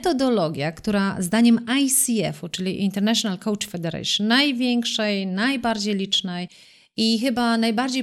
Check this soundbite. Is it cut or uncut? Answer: uncut